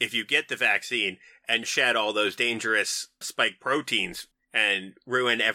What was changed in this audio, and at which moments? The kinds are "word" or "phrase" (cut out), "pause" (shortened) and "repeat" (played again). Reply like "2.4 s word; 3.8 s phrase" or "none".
1.6 s phrase; 3.2 s word; 4.3 s pause